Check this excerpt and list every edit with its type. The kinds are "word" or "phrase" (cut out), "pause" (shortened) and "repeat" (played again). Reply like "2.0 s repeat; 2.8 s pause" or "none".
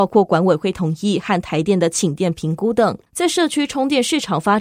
3.1 s pause